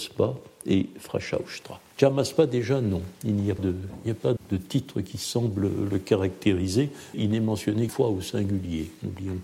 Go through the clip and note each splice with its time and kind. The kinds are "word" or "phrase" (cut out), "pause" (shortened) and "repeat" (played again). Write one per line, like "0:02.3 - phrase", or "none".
0:01.9 - pause
0:03.6 - word
0:04.4 - word
0:07.1 - word
0:07.9 - word